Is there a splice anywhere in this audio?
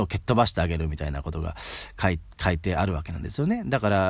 no; 0 cuts

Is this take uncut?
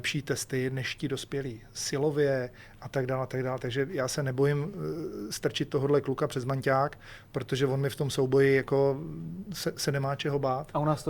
yes; 0 cuts

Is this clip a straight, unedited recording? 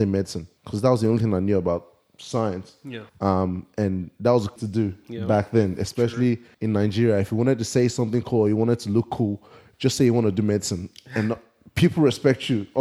no; 3 cuts; at 3.1 s, 4.6 s, 6.5 s

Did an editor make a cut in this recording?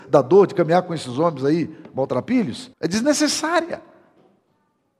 yes; 1 cut; at 2.7 s

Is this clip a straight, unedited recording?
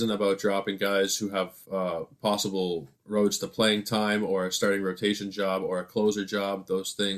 no; 2 cuts; at 1.6 s, 2.9 s

